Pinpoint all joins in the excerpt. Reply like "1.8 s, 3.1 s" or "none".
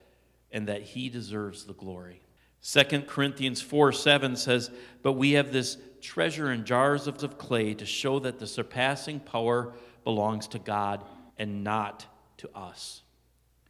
2.4 s, 7.2 s, 11.3 s